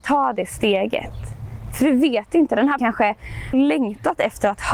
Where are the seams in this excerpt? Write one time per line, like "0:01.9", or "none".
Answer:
0:02.8
0:03.5